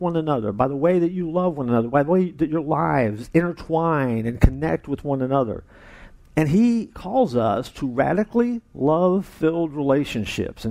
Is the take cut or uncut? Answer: uncut